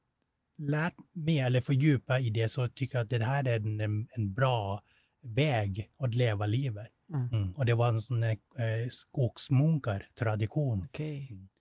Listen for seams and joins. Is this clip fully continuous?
yes; 0 cuts

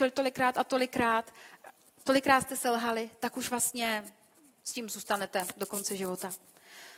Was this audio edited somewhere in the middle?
no; 0 cuts

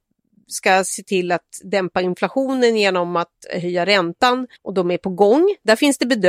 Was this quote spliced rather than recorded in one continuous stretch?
yes; 1 cut; at 4.6 s

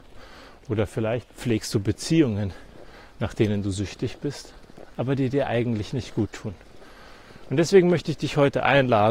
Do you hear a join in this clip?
no; 0 cuts

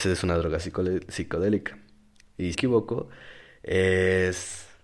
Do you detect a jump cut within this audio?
yes; 1 cut; at 2.5 s

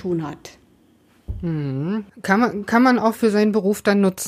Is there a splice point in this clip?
no; 0 cuts

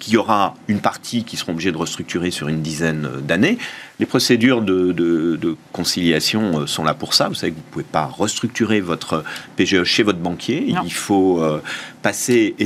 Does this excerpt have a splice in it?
no; 0 cuts

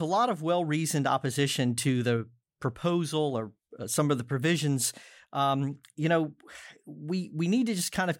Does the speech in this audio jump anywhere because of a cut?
no; 0 cuts

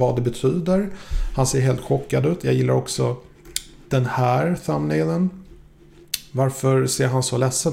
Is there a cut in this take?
no; 0 cuts

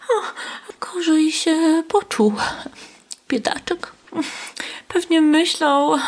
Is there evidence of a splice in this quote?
no; 0 cuts

